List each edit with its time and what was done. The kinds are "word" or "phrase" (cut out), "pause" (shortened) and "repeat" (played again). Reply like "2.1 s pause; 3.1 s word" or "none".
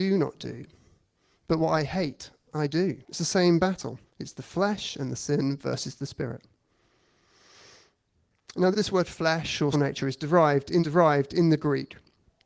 3.0 s pause; 4.0 s pause; 8.7 s word; 9.7 s word; 10.8 s repeat

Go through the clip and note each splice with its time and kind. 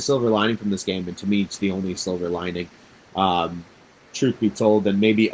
none

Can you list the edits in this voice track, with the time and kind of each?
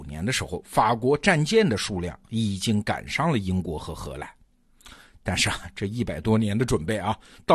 none

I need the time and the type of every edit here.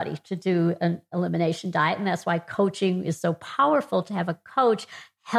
none

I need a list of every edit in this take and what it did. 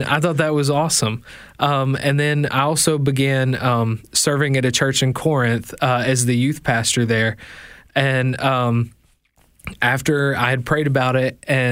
none

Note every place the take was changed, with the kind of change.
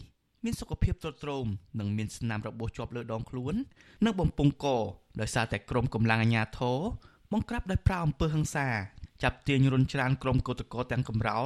none

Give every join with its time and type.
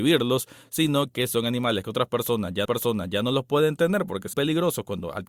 2.7 s repeat; 4.3 s word

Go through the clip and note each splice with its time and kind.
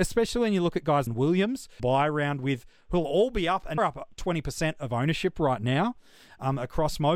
1.1 s phrase; 1.8 s phrase; 3.8 s word

